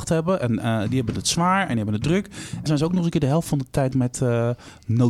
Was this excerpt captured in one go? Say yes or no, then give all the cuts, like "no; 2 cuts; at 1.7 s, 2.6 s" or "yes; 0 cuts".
no; 2 cuts; at 2.7 s, 3.9 s